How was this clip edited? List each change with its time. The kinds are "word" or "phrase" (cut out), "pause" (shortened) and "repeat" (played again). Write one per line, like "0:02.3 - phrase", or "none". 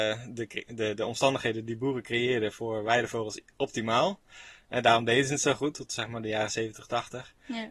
none